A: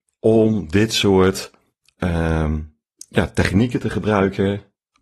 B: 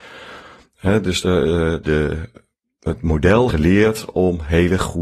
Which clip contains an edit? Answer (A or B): B